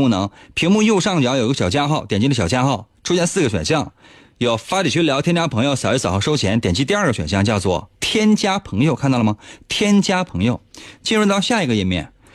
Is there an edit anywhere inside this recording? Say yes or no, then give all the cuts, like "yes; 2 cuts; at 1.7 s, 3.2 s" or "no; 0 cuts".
yes; 1 cut; at 8.0 s